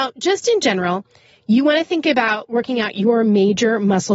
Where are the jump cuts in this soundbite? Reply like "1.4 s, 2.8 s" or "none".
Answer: none